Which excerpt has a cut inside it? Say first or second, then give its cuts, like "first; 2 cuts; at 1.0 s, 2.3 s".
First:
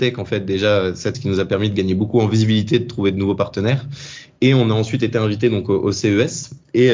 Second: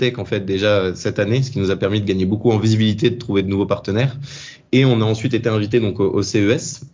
first; 1 cut; at 1.1 s